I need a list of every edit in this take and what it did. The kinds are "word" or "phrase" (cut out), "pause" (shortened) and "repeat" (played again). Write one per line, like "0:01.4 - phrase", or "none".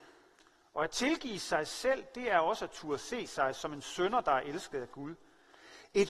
none